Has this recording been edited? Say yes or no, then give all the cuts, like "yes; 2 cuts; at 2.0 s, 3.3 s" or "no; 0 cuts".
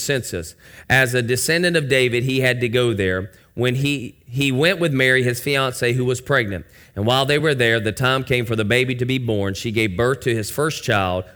no; 0 cuts